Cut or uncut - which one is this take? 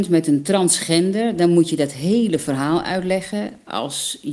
uncut